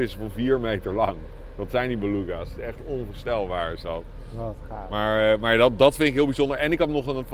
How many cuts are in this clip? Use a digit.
0